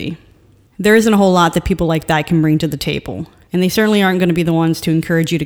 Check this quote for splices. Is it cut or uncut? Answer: uncut